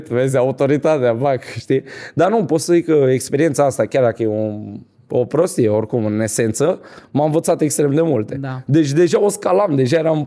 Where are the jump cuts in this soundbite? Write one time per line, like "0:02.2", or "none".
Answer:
none